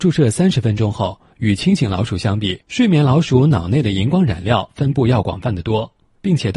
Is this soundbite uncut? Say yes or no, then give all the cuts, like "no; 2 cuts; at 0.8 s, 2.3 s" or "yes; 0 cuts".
no; 1 cut; at 2.6 s